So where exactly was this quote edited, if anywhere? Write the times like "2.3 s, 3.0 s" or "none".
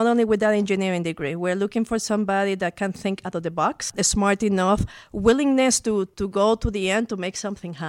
none